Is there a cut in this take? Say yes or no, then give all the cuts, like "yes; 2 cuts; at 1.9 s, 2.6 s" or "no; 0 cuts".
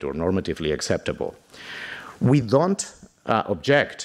no; 0 cuts